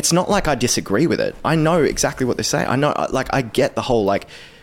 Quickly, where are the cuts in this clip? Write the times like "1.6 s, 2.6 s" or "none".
none